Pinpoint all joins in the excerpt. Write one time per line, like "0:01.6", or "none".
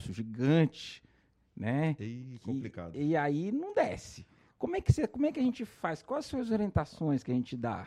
none